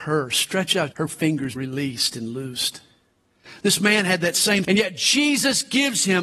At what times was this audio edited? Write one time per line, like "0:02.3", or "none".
0:00.9
0:01.6
0:04.6